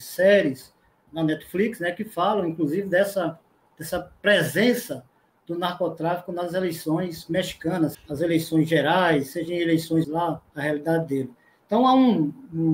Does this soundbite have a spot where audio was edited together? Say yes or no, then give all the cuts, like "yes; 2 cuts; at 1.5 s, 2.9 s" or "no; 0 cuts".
yes; 4 cuts; at 1.1 s, 7.9 s, 10.0 s, 10.5 s